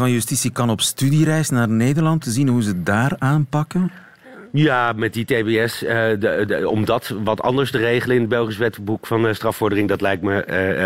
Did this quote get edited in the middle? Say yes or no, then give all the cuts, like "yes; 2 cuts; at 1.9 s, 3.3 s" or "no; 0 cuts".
yes; 2 cuts; at 2.2 s, 6.5 s